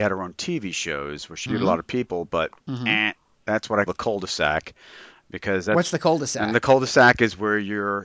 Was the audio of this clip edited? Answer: yes; 3 cuts; at 1.5 s, 2.6 s, 3.9 s

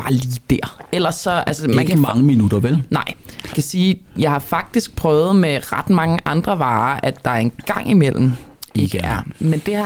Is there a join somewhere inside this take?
yes; 1 cut; at 3.5 s

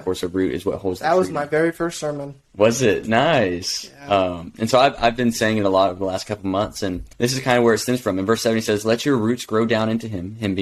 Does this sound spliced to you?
yes; 1 cut; at 7.1 s

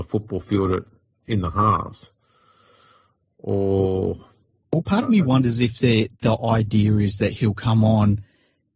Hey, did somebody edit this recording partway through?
no; 0 cuts

